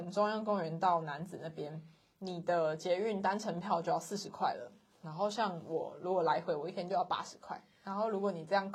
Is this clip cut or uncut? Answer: uncut